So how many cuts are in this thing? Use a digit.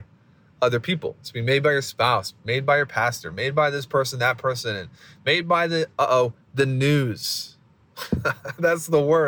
0